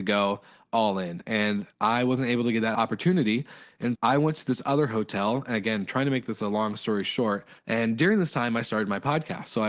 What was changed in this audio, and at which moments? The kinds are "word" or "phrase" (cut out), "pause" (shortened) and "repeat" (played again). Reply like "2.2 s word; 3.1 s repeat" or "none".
1.7 s pause; 3.9 s word; 7.6 s pause